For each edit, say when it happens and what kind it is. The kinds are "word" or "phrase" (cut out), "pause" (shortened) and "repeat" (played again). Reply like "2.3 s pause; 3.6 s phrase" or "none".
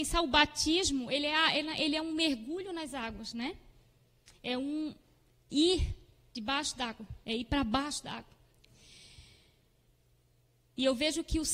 none